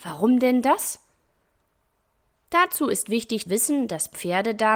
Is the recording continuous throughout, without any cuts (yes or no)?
no